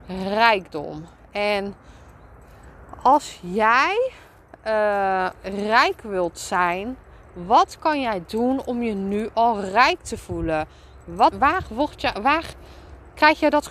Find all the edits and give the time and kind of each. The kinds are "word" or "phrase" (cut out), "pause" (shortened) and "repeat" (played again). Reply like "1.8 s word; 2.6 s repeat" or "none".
11.3 s word